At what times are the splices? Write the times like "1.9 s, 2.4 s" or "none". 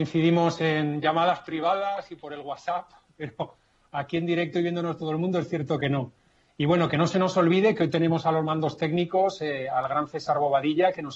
none

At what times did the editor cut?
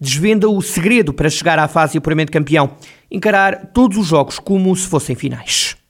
none

